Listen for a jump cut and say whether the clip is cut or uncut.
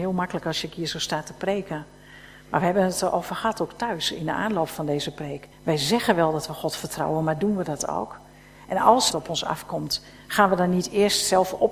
cut